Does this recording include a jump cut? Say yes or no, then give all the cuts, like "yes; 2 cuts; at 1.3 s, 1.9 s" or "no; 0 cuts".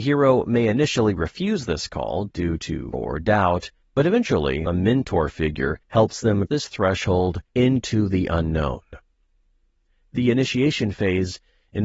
yes; 6 cuts; at 2.9 s, 3.8 s, 4.7 s, 5.8 s, 6.5 s, 7.5 s